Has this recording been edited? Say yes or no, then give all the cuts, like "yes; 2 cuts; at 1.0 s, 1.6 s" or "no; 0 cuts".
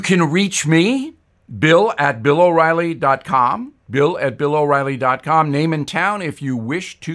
no; 0 cuts